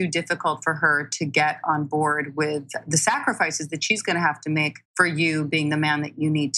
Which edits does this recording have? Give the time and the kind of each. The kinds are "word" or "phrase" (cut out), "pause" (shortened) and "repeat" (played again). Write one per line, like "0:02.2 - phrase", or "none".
0:04.8 - pause